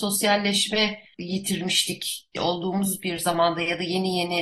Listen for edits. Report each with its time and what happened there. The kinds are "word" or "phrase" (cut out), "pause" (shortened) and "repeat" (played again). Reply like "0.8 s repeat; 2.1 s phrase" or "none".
1.1 s word; 2.4 s word